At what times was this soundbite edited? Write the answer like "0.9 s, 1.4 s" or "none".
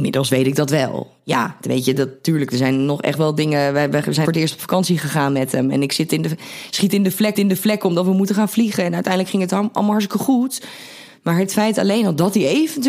4.2 s, 7.3 s